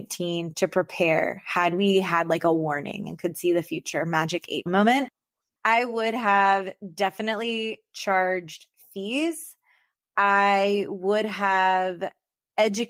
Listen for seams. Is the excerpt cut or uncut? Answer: cut